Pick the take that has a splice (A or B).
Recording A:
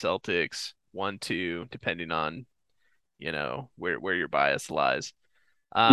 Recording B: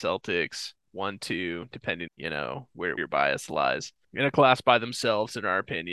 B